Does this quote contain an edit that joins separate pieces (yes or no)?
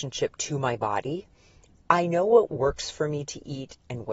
no